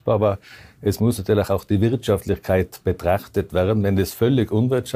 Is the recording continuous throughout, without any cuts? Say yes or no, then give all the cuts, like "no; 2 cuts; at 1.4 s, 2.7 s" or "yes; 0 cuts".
yes; 0 cuts